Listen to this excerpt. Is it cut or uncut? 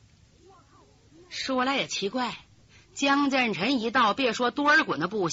uncut